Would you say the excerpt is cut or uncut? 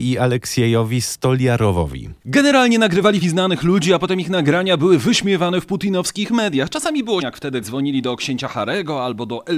cut